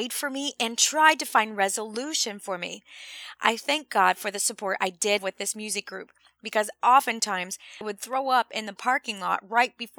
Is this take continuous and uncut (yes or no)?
no